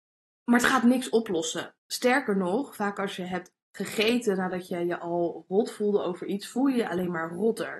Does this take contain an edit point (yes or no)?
yes